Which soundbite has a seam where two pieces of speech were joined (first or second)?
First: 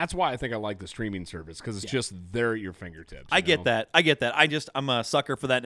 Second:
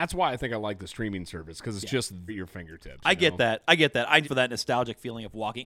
second